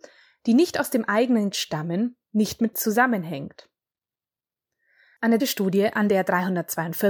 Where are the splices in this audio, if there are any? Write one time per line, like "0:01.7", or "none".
0:01.5
0:02.7
0:05.4